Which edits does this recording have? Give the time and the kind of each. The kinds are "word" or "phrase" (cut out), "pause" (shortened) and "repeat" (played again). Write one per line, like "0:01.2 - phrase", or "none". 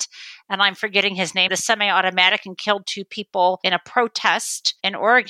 0:01.5 - phrase